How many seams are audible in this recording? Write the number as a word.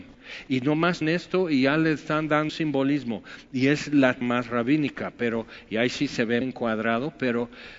four